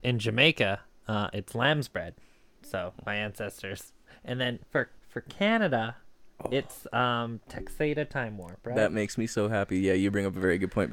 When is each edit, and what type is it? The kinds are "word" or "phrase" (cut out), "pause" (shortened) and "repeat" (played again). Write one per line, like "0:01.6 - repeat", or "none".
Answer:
0:05.0 - pause